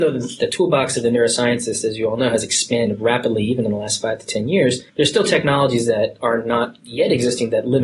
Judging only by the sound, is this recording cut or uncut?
cut